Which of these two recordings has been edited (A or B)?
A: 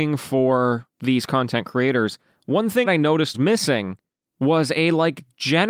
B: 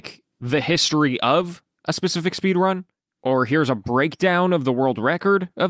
A